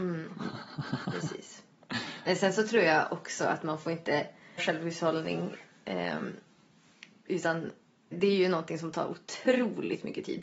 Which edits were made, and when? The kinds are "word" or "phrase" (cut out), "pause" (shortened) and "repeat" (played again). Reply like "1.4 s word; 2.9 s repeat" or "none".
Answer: 4.6 s word; 8.1 s word